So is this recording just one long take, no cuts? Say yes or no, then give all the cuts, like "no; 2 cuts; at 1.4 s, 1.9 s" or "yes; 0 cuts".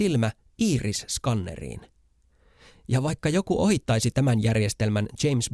yes; 0 cuts